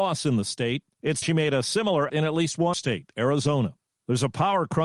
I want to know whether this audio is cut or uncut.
cut